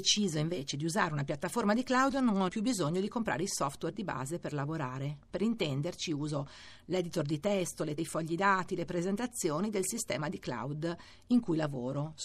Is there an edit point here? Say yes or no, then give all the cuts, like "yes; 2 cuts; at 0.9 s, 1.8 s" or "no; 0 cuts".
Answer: yes; 2 cuts; at 2.5 s, 8.0 s